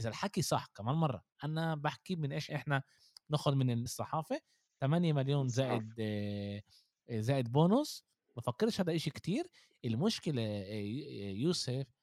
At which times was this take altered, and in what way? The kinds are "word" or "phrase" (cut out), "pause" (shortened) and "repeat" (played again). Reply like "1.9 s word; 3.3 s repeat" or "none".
2.5 s word; 3.9 s word